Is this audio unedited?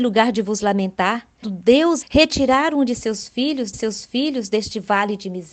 no; 3 cuts; at 1.4 s, 2.0 s, 3.7 s

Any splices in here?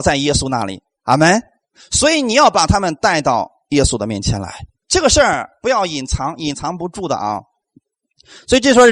yes; 1 cut; at 4.8 s

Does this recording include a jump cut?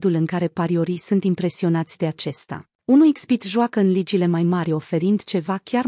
yes; 1 cut; at 2.7 s

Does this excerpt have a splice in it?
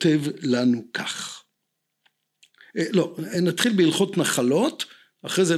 no; 0 cuts

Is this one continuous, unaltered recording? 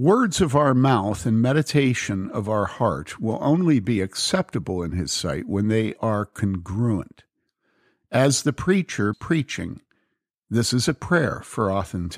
no; 1 cut; at 9.1 s

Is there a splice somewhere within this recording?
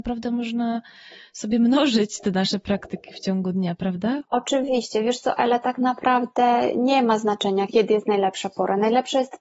yes; 1 cut; at 4.3 s

